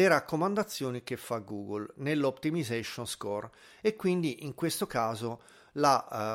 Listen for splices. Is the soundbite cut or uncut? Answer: uncut